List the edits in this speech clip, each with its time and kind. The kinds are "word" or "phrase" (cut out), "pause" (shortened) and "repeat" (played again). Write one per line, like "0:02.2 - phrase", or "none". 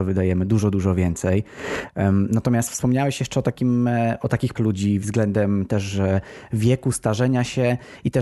0:04.6 - word